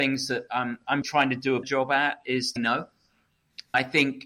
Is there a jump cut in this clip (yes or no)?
yes